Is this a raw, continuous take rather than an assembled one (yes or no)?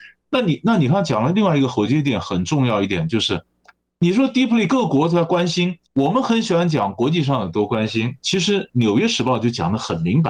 no